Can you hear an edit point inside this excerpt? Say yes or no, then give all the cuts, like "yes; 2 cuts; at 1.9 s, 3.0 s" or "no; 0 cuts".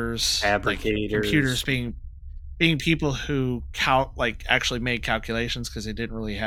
no; 0 cuts